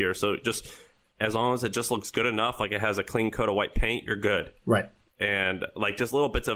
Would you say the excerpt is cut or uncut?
uncut